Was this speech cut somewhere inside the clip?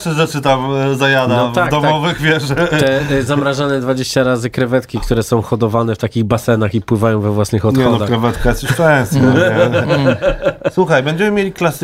no; 0 cuts

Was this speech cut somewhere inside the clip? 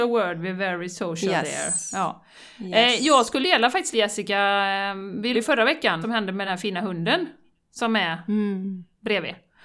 yes; 5 cuts; at 3.4 s, 3.9 s, 5.3 s, 6.0 s, 6.5 s

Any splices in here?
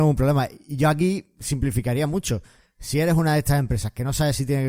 no; 0 cuts

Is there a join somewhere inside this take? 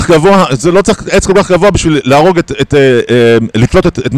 no; 0 cuts

